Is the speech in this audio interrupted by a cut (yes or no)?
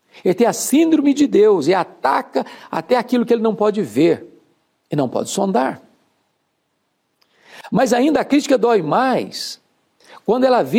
no